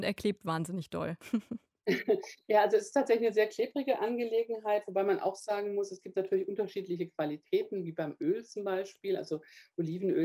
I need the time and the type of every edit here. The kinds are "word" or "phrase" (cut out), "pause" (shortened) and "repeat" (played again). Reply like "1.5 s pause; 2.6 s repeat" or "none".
5.9 s word